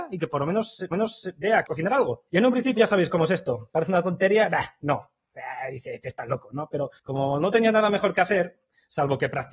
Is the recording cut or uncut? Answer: cut